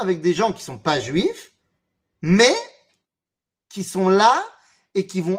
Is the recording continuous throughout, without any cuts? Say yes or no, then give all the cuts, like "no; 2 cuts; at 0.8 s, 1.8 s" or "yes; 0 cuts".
no; 1 cut; at 1.9 s